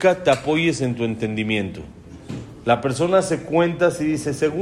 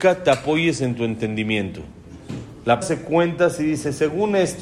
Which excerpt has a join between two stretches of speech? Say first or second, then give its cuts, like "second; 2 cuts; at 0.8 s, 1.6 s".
second; 1 cut; at 2.8 s